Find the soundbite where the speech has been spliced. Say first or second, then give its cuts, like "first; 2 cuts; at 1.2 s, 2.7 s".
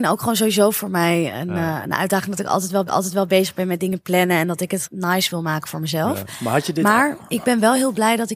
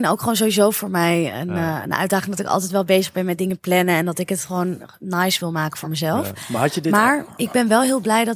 first; 2 cuts; at 2.9 s, 4.8 s